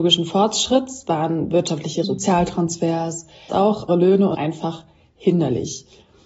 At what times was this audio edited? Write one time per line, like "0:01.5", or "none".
0:02.0
0:03.5
0:03.9
0:04.3